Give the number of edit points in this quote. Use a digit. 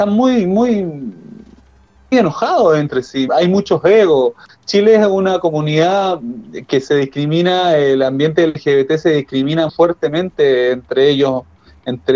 3